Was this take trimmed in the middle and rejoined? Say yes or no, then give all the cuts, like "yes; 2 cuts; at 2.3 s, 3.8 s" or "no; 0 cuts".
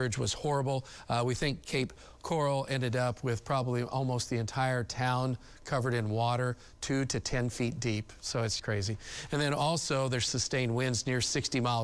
yes; 2 cuts; at 8.6 s, 10.3 s